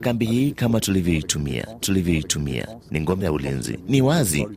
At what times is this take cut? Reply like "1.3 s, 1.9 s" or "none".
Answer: 1.8 s, 3.2 s